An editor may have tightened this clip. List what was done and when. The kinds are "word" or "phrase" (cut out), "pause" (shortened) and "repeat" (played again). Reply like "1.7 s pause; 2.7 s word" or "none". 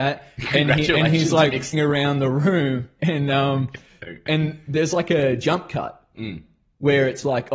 1.7 s word; 3.0 s word